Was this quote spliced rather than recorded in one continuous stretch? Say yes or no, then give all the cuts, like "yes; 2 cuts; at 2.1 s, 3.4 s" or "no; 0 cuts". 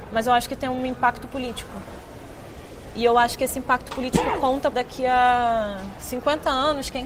yes; 1 cut; at 4.7 s